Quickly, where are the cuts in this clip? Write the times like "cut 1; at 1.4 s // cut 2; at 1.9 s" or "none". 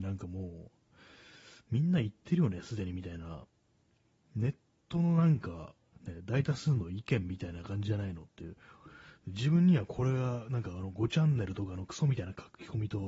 none

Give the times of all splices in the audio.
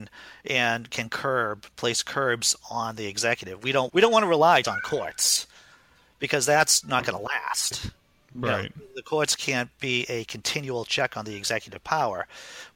cut 1; at 3.9 s // cut 2; at 4.6 s // cut 3; at 6.8 s

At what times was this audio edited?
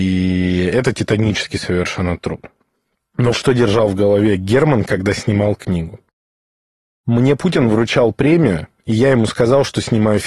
cut 1; at 3.3 s

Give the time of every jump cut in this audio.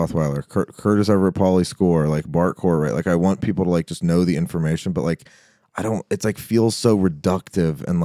none

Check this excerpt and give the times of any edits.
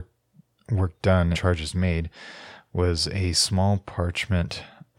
cut 1; at 1.3 s

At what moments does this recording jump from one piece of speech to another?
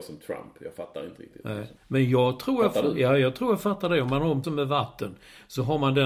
cut 1; at 1.8 s // cut 2; at 4.4 s

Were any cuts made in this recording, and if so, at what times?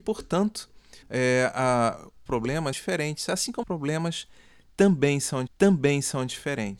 cut 1; at 1.0 s // cut 2; at 2.3 s // cut 3; at 2.7 s // cut 4; at 3.6 s // cut 5; at 5.5 s

